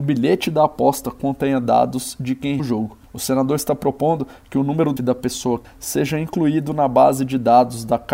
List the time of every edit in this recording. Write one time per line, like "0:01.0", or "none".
0:02.6
0:03.0
0:05.0
0:05.6